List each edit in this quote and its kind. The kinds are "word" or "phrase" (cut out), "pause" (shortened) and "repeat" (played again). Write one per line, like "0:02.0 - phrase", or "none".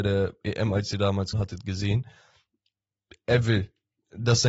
0:01.3 - word